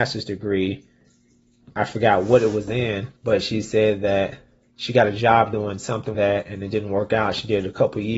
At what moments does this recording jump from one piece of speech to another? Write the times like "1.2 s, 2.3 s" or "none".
3.2 s, 4.6 s, 6.1 s, 6.7 s